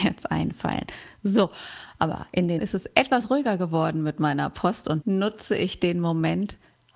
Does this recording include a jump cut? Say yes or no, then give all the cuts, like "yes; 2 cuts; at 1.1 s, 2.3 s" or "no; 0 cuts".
yes; 2 cuts; at 2.6 s, 5.0 s